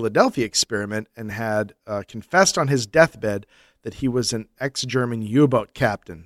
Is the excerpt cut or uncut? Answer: uncut